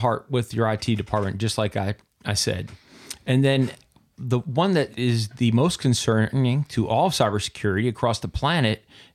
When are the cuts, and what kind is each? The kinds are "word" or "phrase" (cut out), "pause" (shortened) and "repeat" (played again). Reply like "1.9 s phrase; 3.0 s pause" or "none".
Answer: none